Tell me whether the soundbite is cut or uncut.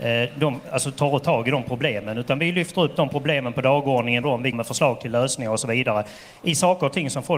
cut